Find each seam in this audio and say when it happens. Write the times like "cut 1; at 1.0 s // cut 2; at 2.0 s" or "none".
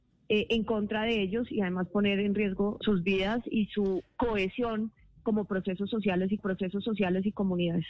cut 1; at 2.8 s // cut 2; at 6.4 s